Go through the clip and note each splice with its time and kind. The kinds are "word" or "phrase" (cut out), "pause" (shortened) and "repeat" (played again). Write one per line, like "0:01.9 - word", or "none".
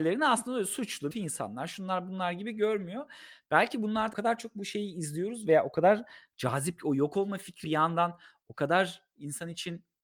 0:01.1 - phrase
0:04.1 - phrase
0:07.6 - word